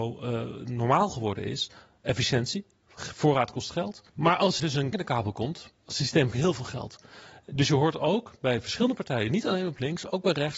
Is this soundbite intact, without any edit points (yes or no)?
no